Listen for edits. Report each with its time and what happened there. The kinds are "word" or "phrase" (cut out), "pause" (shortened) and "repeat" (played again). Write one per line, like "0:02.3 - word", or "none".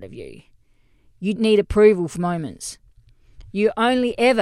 0:01.4 - word
0:02.2 - word